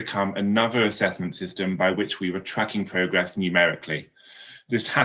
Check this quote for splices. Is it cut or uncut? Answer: uncut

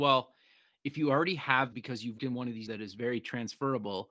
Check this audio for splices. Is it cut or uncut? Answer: cut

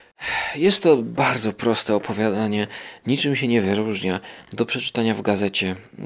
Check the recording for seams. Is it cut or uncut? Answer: uncut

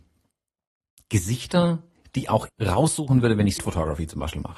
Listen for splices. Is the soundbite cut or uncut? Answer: cut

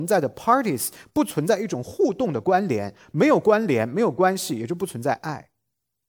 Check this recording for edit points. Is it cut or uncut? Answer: uncut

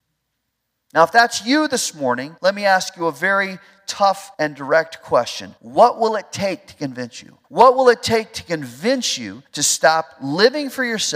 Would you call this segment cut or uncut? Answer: cut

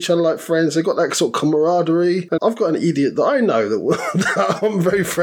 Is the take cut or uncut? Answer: cut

